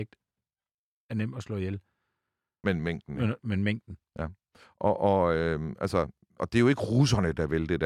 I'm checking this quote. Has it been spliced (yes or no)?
no